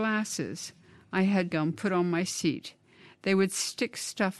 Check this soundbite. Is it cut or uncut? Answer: cut